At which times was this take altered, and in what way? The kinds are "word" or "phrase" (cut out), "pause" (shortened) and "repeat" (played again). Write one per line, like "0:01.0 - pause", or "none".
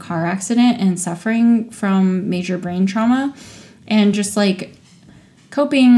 none